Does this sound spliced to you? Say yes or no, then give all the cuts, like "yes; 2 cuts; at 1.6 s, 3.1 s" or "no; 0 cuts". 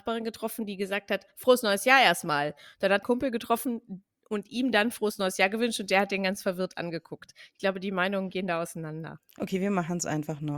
yes; 2 cuts; at 3.0 s, 9.3 s